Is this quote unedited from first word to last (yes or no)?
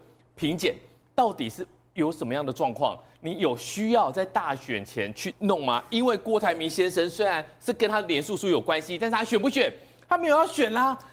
yes